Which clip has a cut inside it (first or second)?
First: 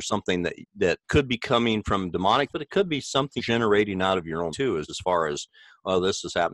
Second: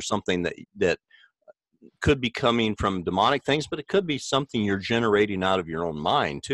first